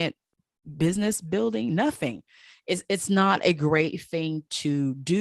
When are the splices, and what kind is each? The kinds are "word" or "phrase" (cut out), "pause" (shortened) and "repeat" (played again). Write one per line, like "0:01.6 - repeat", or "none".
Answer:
none